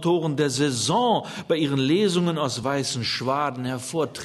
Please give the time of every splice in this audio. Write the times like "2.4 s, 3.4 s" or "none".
none